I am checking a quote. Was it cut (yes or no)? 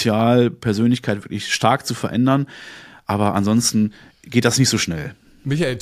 no